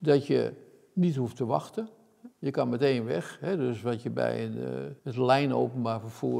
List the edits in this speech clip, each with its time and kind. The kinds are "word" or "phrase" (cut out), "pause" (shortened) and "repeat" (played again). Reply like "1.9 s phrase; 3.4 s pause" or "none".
2.3 s pause; 5.0 s word